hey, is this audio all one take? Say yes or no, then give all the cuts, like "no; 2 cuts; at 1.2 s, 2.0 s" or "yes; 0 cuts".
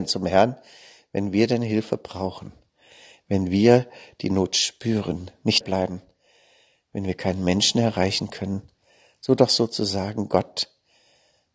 no; 1 cut; at 5.6 s